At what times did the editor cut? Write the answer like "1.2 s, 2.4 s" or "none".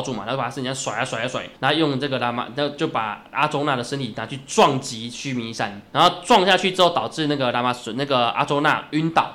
1.6 s, 5.9 s